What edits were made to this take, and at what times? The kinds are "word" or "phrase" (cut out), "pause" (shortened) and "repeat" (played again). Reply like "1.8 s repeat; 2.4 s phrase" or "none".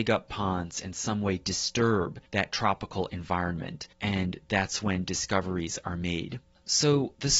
none